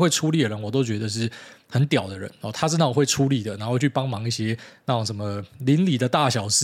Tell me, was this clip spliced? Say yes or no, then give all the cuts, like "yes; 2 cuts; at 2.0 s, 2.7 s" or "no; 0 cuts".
no; 0 cuts